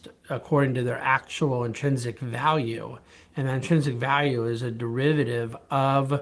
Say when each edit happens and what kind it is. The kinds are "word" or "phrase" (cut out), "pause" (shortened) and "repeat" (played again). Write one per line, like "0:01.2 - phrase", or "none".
none